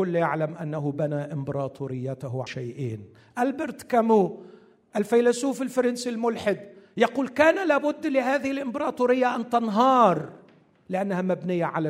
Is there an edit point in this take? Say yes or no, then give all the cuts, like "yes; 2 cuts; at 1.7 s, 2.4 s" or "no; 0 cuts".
yes; 1 cut; at 2.5 s